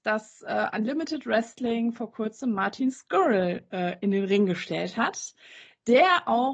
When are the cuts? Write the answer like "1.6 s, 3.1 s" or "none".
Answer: none